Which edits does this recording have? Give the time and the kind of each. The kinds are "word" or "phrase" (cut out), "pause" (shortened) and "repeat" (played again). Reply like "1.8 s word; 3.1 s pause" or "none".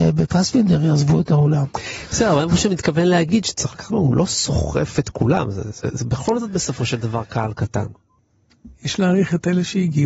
3.9 s word

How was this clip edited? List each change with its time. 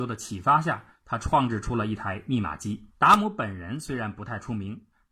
2.9 s pause

